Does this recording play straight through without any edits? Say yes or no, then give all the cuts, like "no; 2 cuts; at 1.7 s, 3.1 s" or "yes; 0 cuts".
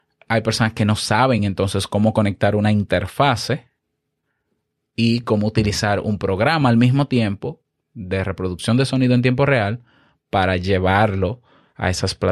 yes; 0 cuts